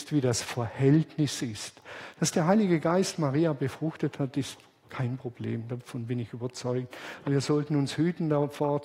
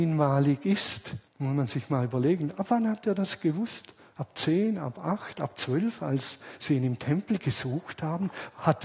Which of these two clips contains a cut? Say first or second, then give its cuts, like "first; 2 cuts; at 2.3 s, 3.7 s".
second; 2 cuts; at 1.3 s, 4.0 s